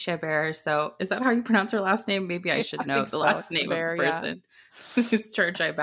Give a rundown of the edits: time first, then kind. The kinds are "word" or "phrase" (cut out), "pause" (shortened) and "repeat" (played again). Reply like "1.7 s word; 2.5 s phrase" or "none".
none